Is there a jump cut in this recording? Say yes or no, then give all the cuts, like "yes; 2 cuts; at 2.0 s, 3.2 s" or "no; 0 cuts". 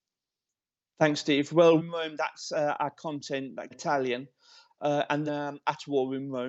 yes; 3 cuts; at 1.8 s, 3.7 s, 5.3 s